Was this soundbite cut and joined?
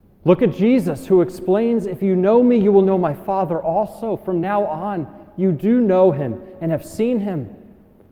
no; 0 cuts

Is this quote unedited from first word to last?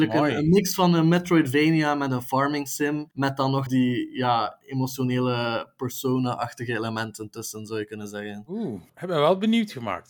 no; 3 cuts; at 3.1 s, 3.7 s, 8.9 s

